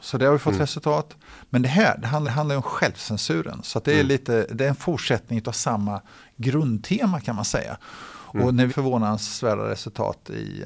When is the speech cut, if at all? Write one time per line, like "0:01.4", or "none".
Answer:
0:02.2
0:08.7